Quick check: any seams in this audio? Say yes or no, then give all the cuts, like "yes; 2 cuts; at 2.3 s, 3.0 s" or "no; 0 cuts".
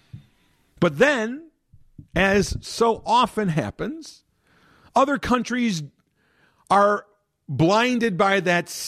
no; 0 cuts